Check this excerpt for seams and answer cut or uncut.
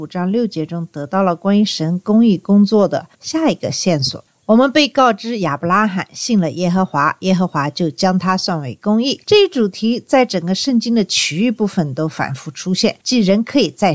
cut